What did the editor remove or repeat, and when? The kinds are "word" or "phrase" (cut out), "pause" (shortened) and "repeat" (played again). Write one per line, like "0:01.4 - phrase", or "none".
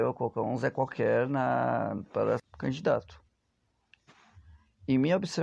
0:02.4 - word